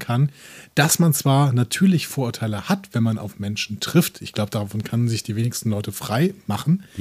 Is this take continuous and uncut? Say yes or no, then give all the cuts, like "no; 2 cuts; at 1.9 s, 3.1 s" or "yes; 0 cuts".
yes; 0 cuts